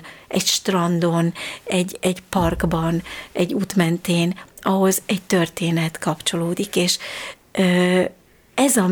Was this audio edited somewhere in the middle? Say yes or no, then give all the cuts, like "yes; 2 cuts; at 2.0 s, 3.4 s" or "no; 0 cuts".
no; 0 cuts